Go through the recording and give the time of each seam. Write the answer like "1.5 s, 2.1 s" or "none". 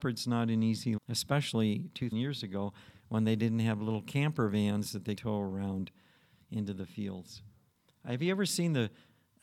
1.0 s, 2.1 s, 5.2 s